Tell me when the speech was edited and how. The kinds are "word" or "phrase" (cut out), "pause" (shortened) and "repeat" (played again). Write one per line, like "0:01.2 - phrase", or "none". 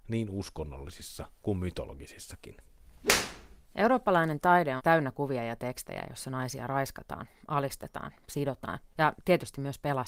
0:03.6 - pause
0:04.8 - word
0:08.9 - pause